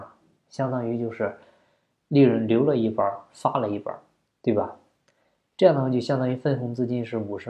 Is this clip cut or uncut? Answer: uncut